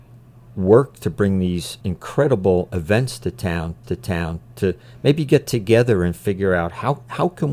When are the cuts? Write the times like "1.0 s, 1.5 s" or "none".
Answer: 1.8 s, 3.8 s